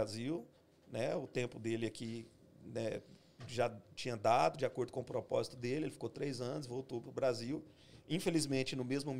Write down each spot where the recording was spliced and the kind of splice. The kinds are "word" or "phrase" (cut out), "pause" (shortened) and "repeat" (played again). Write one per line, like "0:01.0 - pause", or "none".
none